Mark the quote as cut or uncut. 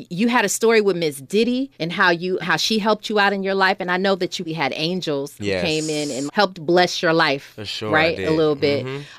cut